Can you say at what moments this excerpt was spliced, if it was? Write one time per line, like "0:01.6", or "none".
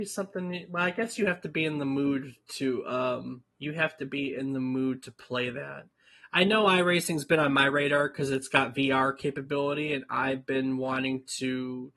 0:03.5